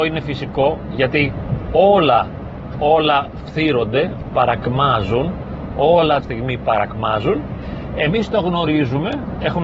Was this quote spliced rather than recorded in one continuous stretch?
yes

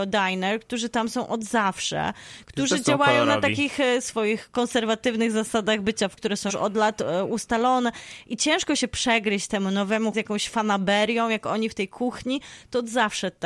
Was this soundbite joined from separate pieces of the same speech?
yes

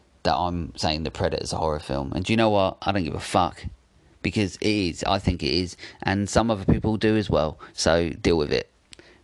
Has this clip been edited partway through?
no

